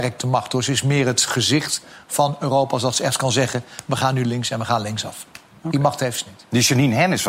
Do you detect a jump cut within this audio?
no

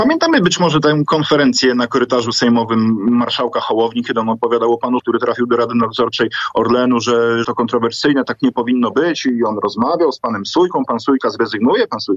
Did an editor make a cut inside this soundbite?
yes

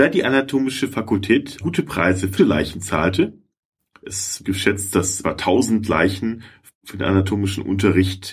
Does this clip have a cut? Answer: yes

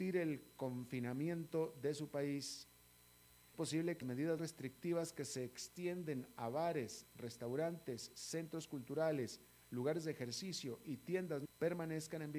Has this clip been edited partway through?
yes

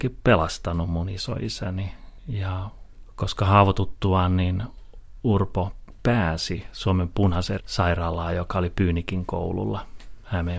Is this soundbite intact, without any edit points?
no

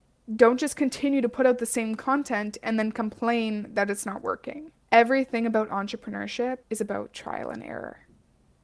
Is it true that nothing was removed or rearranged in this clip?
no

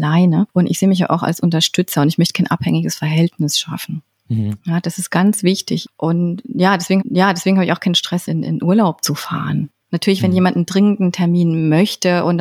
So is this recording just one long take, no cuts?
no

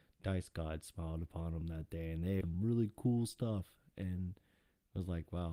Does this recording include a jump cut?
yes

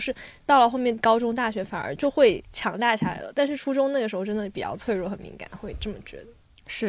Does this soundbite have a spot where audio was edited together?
no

